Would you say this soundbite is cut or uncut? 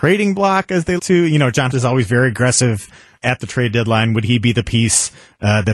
cut